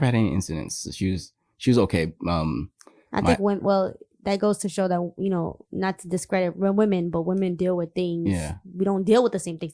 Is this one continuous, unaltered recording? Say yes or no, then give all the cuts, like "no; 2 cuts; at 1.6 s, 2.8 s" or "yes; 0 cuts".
yes; 0 cuts